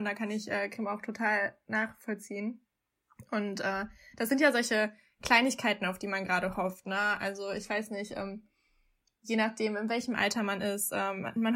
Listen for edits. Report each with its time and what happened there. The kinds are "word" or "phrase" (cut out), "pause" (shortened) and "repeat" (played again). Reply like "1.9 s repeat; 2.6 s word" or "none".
none